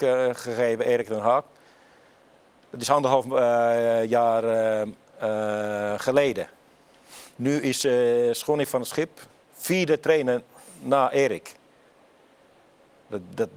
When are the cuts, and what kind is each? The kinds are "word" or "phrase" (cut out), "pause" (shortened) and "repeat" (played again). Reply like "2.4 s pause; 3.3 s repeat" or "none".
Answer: none